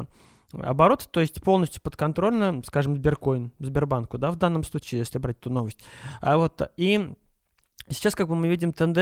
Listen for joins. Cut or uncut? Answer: uncut